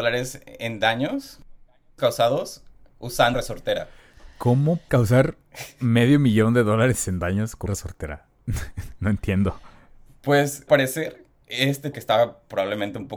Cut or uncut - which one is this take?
cut